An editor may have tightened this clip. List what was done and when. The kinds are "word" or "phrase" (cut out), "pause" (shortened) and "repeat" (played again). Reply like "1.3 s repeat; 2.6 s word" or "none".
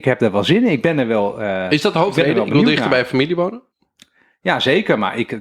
none